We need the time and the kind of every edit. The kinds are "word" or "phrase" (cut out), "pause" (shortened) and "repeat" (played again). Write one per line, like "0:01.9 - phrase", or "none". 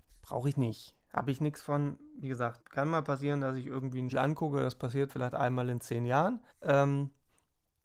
0:02.6 - word
0:04.1 - word
0:05.1 - word
0:06.5 - pause